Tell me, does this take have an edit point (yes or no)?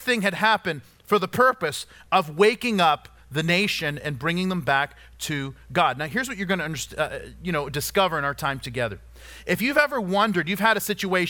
no